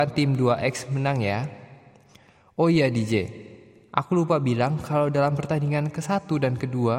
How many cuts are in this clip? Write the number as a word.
zero